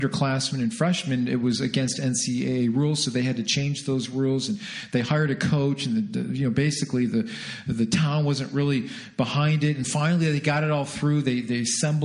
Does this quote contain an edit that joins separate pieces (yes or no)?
yes